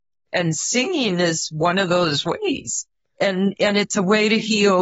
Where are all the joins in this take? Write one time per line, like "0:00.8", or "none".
none